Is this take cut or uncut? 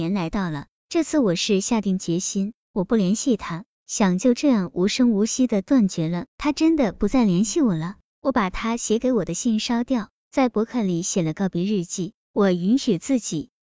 cut